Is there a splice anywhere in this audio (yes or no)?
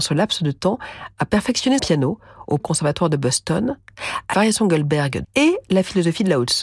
yes